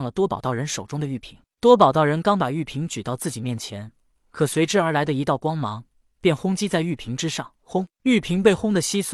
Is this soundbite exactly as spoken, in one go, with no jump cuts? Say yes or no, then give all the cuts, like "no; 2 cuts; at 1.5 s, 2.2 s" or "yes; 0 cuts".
no; 1 cut; at 7.6 s